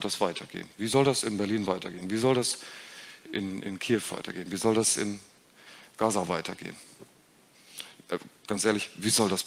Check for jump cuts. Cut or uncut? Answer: uncut